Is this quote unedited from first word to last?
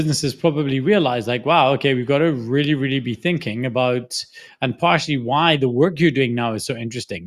yes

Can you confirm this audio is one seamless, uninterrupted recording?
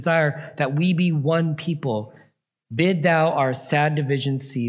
yes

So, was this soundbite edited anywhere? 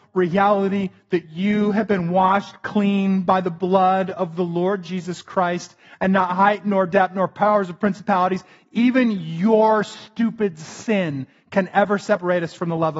no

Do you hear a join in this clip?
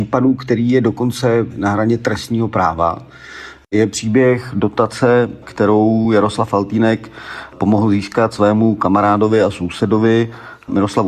no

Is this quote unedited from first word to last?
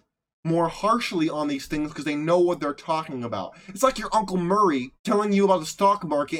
no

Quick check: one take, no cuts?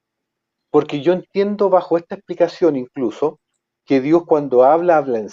yes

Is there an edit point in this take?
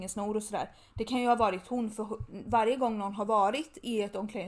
no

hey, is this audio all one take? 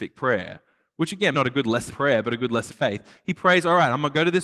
no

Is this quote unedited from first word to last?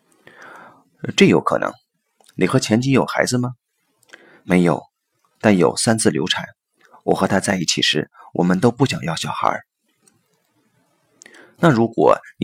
yes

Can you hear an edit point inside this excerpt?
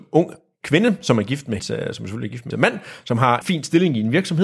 yes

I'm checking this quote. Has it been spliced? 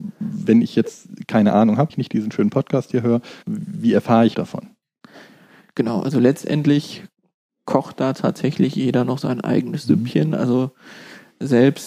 yes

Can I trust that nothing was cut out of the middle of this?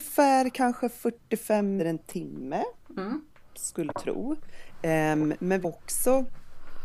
no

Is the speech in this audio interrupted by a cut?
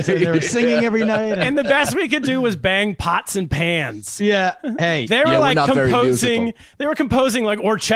no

